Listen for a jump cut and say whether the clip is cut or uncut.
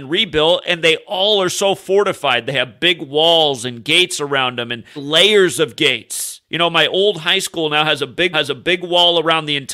cut